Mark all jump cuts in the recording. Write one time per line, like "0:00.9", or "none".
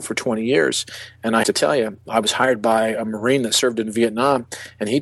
0:01.4
0:02.1